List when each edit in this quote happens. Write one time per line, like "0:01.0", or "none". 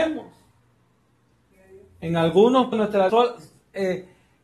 0:02.7
0:03.1